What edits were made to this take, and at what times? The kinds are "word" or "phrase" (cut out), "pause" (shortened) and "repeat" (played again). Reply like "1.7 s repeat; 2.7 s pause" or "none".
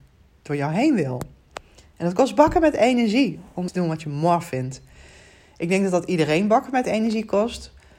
3.7 s word